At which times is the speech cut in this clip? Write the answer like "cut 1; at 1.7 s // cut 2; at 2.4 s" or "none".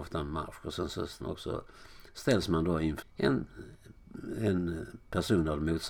cut 1; at 1.2 s // cut 2; at 3.0 s